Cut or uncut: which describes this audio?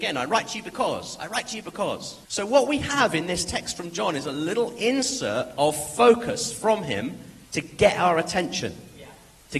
cut